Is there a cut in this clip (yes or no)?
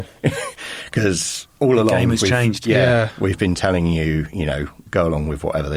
no